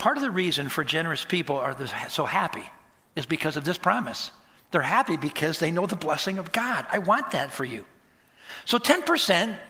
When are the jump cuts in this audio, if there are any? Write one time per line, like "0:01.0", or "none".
none